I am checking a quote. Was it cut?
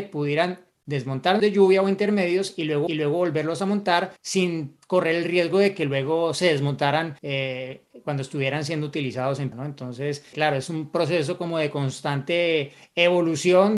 yes; 6 cuts; at 1.4 s, 2.9 s, 4.2 s, 7.2 s, 9.5 s, 10.3 s

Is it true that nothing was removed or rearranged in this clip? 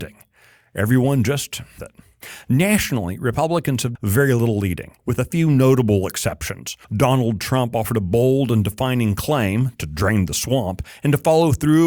no; 4 cuts; at 1.8 s, 3.9 s, 5.0 s, 6.8 s

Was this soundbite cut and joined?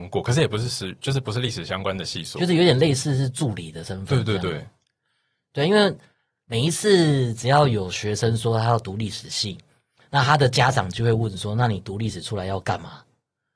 no; 0 cuts

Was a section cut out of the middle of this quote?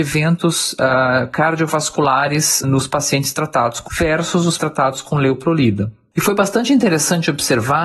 yes; 3 cuts; at 2.6 s, 3.9 s, 4.6 s

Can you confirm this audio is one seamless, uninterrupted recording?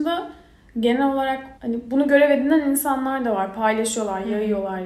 no; 1 cut; at 1.6 s

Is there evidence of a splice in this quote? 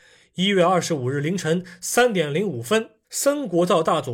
yes; 1 cut; at 3.0 s

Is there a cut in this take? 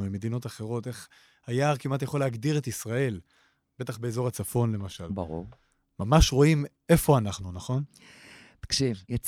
no; 0 cuts

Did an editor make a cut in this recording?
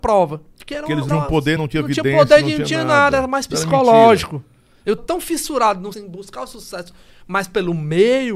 yes; 4 cuts; at 1.1 s, 1.6 s, 5.0 s, 5.9 s

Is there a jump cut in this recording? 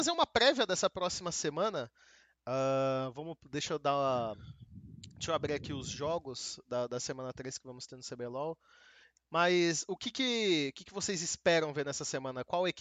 no; 0 cuts

